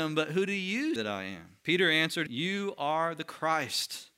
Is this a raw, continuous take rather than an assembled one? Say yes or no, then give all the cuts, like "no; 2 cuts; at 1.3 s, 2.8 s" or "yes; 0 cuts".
no; 3 cuts; at 1.0 s, 1.6 s, 2.3 s